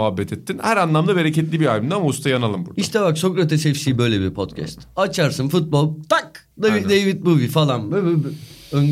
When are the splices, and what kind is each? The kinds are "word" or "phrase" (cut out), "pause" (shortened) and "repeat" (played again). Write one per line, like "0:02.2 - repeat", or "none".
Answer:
0:06.5 - pause